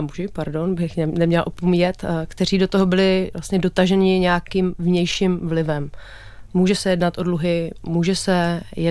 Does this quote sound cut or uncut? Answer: cut